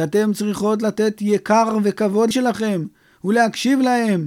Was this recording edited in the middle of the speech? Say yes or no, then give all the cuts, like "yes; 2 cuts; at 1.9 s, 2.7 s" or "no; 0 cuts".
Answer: yes; 1 cut; at 2.3 s